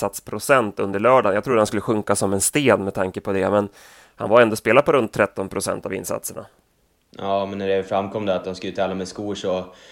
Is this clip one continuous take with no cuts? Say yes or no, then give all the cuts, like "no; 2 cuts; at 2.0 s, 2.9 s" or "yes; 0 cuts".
yes; 0 cuts